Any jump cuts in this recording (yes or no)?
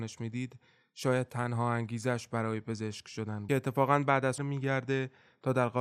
yes